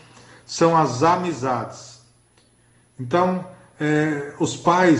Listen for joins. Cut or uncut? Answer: uncut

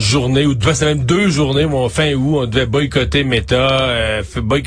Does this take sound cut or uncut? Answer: uncut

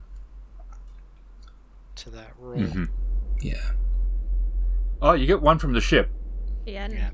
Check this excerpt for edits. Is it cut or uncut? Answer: uncut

